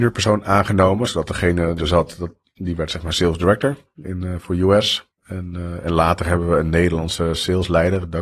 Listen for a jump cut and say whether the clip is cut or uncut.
cut